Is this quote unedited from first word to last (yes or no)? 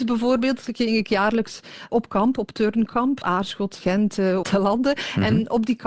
no